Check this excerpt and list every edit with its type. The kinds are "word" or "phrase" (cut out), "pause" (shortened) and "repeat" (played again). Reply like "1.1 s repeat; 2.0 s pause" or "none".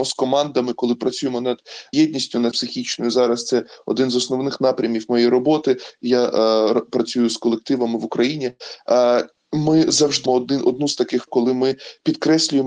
1.9 s word; 2.5 s word; 10.3 s word; 11.3 s word